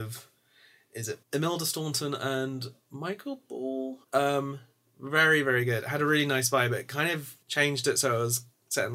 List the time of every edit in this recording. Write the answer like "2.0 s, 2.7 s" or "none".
1.2 s, 4.0 s, 7.4 s